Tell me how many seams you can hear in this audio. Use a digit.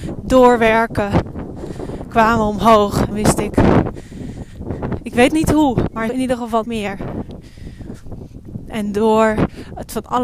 4